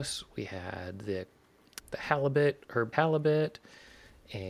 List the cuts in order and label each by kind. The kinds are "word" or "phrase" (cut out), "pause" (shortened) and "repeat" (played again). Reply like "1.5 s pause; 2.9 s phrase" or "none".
1.8 s word; 2.9 s word